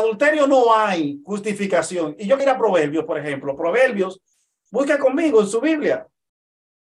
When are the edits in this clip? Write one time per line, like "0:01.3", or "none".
0:02.4